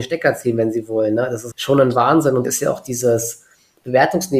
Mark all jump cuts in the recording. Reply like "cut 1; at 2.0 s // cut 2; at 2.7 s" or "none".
cut 1; at 1.5 s // cut 2; at 2.4 s